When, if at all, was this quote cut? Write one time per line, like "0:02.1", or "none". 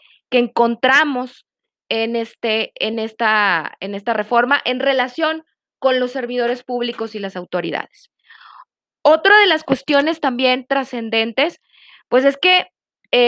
none